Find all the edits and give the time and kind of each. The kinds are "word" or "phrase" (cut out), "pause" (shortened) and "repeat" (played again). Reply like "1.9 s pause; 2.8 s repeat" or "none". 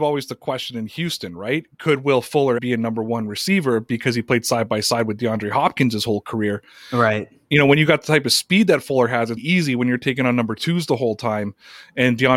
2.6 s word; 9.4 s word